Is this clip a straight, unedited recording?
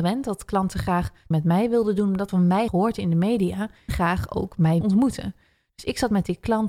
no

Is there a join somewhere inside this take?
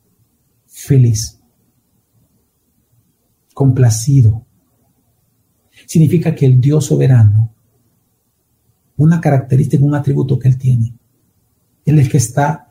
no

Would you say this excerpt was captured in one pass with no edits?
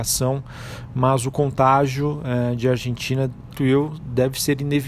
no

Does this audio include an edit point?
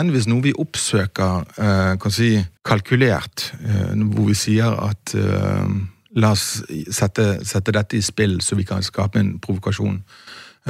yes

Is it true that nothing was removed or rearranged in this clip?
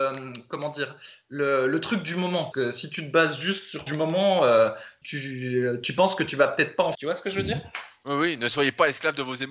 no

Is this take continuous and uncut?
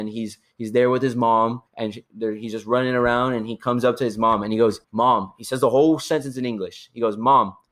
no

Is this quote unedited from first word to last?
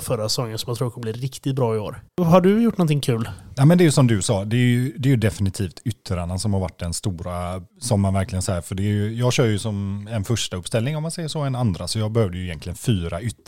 no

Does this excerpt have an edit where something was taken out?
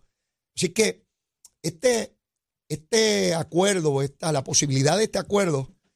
no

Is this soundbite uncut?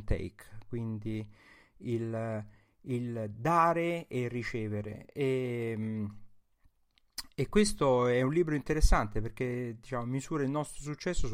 yes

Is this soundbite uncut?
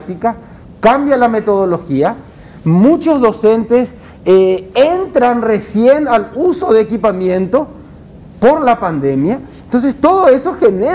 yes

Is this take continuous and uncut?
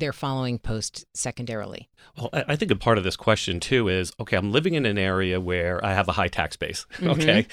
no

